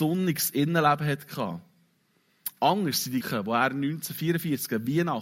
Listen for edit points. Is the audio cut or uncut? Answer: cut